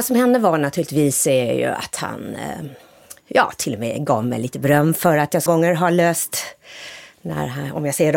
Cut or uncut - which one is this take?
cut